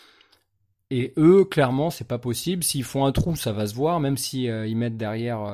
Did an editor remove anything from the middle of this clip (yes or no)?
no